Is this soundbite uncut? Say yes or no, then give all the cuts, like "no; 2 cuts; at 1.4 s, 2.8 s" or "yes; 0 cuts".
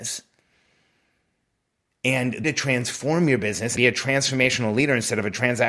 no; 2 cuts; at 2.4 s, 3.8 s